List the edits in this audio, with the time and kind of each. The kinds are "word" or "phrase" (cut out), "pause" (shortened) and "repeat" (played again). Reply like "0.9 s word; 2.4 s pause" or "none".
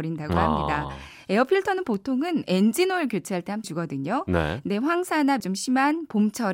3.6 s word; 5.4 s word